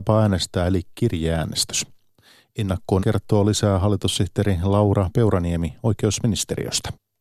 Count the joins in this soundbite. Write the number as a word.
one